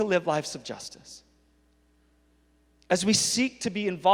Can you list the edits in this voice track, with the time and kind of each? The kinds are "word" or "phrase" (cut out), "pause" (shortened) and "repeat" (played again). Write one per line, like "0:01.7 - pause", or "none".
none